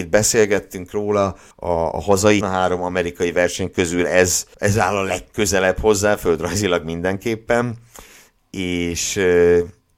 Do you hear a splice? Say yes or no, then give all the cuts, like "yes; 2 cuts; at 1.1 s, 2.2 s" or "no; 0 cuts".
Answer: yes; 3 cuts; at 1.5 s, 2.4 s, 4.5 s